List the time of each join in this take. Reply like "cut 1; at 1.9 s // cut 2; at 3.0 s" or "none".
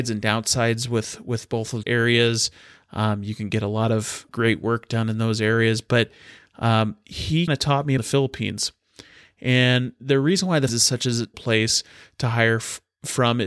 cut 1; at 1.8 s // cut 2; at 4.3 s // cut 3; at 7.5 s // cut 4; at 8.0 s // cut 5; at 10.7 s // cut 6; at 11.3 s